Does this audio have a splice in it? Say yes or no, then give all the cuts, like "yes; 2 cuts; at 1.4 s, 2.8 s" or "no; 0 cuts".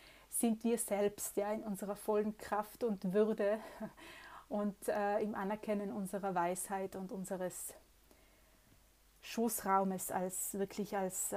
no; 0 cuts